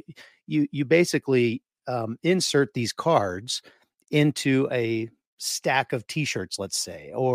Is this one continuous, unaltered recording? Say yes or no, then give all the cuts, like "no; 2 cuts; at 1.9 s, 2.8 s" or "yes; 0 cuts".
yes; 0 cuts